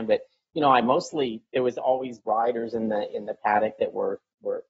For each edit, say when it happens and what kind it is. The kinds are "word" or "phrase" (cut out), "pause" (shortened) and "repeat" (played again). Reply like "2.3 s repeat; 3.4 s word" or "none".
1.5 s word